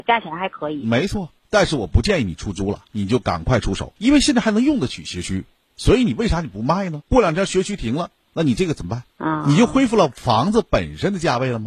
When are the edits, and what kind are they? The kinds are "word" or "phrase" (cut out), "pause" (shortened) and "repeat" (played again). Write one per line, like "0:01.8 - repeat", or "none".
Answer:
0:04.0 - pause
0:07.1 - pause
0:09.1 - pause